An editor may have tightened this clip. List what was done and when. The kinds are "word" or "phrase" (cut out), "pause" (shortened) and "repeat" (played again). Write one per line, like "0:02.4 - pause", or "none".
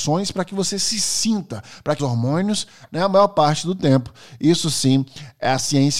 0:02.0 - phrase